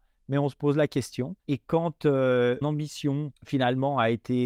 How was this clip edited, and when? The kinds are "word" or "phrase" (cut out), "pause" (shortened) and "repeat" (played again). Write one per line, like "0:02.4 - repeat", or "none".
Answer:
0:01.4 - pause
0:02.6 - word
0:03.4 - pause